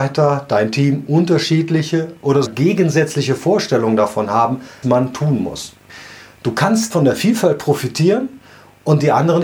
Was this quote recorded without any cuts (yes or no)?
no